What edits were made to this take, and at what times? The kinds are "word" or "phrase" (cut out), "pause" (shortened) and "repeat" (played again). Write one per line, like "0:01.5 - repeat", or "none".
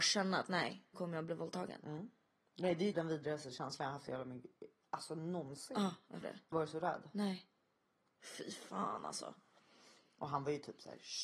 0:00.9 - word
0:02.9 - word
0:06.2 - word
0:06.5 - word